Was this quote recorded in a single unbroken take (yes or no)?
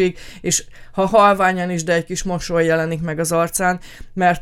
yes